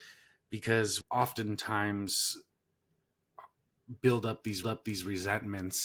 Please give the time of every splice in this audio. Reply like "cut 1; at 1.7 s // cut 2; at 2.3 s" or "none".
cut 1; at 1.0 s // cut 2; at 4.6 s